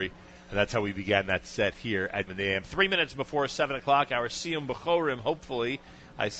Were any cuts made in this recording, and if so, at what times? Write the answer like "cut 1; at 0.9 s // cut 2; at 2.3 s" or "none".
cut 1; at 2.3 s